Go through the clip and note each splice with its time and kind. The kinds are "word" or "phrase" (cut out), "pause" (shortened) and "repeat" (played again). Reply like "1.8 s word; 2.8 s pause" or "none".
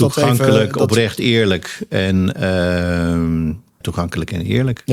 3.8 s word